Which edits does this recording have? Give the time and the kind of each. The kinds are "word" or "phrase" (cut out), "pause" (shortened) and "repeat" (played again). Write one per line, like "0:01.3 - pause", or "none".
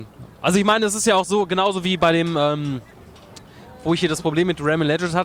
none